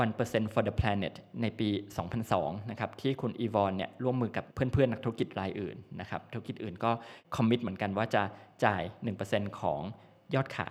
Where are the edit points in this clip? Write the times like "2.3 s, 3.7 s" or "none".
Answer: 4.5 s, 7.2 s